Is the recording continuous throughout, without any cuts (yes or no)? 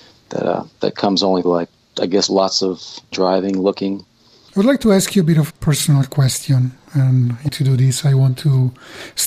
no